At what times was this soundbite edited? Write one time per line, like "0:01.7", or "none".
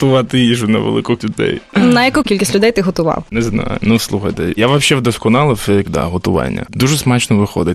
0:01.2
0:02.2
0:04.6
0:05.8